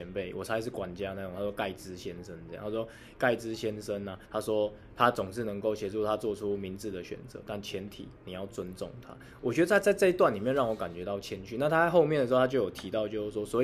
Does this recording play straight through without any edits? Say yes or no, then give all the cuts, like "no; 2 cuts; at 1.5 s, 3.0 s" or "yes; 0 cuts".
no; 1 cut; at 4.2 s